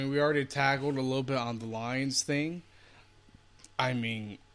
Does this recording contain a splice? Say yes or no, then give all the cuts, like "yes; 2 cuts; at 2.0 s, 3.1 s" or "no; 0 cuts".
no; 0 cuts